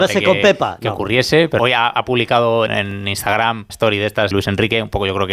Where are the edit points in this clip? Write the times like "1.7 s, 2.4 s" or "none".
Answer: 1.6 s, 2.7 s, 3.7 s, 4.3 s